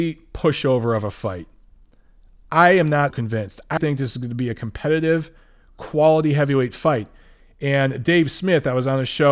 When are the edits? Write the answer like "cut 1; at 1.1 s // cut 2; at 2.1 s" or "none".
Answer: cut 1; at 3.1 s // cut 2; at 3.8 s